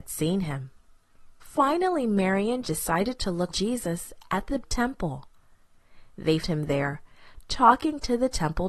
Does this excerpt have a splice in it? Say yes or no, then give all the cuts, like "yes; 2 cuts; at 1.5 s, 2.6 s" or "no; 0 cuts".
yes; 4 cuts; at 2.6 s, 3.5 s, 4.6 s, 6.4 s